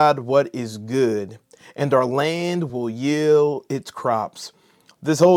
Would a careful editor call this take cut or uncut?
uncut